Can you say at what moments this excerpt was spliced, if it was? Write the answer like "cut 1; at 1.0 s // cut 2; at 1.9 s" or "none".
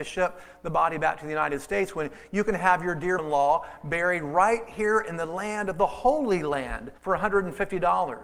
cut 1; at 3.2 s // cut 2; at 7.0 s